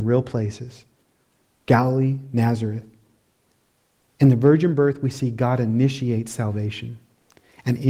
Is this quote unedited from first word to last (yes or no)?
yes